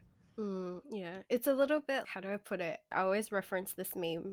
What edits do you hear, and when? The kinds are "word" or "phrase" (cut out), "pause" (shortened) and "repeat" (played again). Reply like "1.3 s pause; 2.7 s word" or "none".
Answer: 2.0 s word